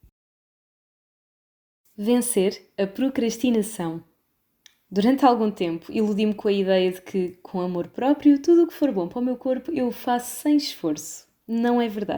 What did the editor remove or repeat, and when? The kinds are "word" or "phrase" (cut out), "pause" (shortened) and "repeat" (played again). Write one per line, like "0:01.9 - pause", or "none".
none